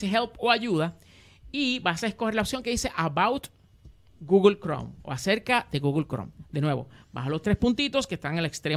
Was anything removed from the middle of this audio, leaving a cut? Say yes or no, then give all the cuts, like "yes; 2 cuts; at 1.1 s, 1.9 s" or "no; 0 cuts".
no; 0 cuts